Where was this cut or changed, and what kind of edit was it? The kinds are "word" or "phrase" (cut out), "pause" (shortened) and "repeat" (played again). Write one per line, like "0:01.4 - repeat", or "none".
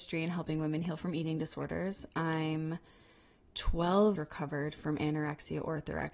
0:04.2 - word